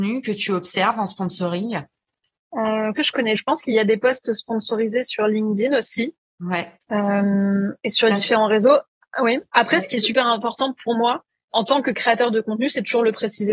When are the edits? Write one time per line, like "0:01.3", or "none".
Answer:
0:02.9
0:03.3
0:03.7
0:11.5